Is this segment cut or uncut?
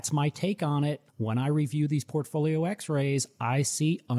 cut